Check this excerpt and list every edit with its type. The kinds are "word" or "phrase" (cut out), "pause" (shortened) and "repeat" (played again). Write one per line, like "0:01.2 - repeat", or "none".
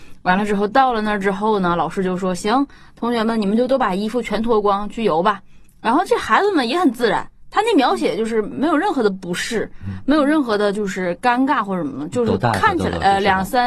none